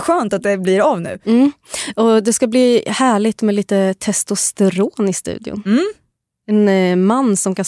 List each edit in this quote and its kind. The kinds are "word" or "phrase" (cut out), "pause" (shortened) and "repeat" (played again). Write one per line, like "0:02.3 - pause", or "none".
none